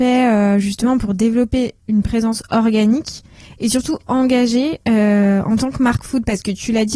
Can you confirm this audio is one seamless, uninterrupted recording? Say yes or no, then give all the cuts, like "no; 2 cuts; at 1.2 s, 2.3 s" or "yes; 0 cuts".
yes; 0 cuts